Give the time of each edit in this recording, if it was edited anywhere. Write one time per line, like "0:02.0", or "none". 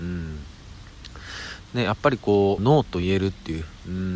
0:02.6